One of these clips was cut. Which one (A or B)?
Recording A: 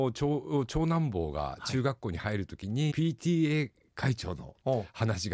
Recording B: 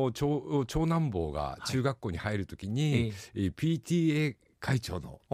A